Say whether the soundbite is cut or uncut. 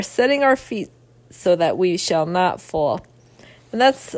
uncut